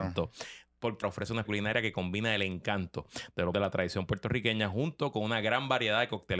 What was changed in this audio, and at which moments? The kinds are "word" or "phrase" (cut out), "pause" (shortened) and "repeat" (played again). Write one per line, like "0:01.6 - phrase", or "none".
0:01.0 - word
0:01.4 - word
0:03.5 - word